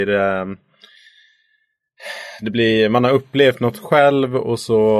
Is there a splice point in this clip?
no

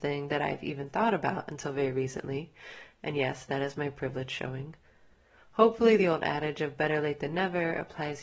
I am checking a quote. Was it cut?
no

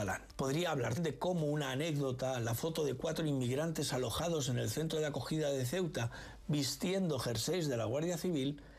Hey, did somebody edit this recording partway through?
yes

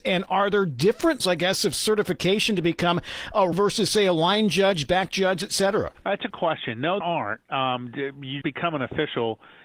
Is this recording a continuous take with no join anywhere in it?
no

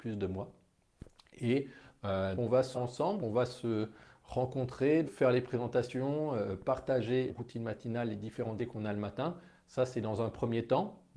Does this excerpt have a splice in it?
yes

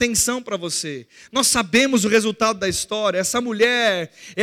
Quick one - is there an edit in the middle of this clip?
no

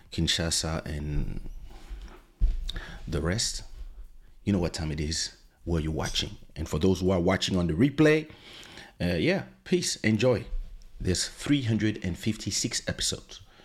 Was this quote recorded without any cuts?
yes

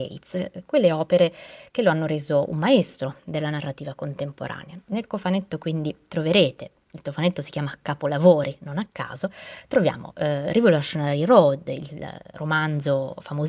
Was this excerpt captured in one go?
yes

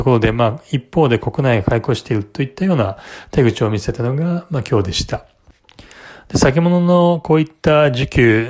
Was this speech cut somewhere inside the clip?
no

